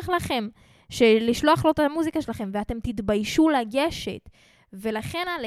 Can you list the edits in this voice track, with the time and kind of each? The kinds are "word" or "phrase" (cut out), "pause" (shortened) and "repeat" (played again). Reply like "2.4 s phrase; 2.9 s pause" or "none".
none